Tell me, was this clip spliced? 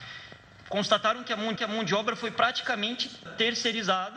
yes; 2 cuts; at 1.6 s, 3.3 s

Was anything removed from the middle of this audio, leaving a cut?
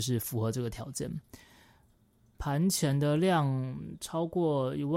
no; 0 cuts

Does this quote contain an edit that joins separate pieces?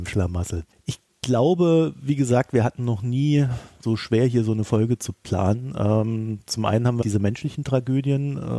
yes; 2 cuts; at 3.8 s, 7.0 s

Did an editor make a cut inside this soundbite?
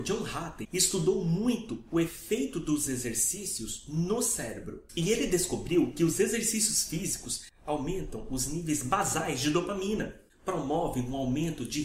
no; 0 cuts

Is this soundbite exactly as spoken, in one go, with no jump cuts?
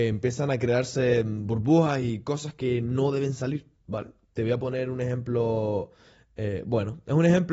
yes; 0 cuts

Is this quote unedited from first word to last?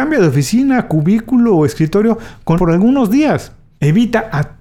no; 1 cut; at 2.6 s

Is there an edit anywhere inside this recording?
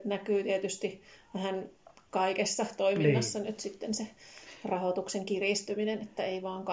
no; 0 cuts

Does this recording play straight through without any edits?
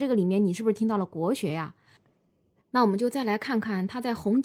yes; 0 cuts

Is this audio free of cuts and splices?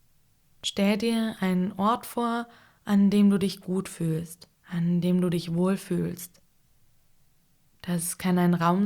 no; 1 cut; at 4.5 s

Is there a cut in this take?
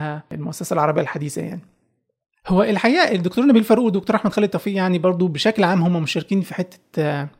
no; 0 cuts

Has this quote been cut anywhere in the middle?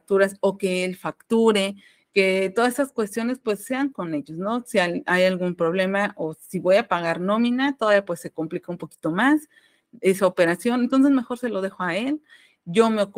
no; 0 cuts

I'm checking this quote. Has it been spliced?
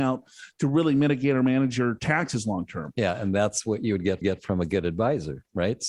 yes; 1 cut; at 4.2 s

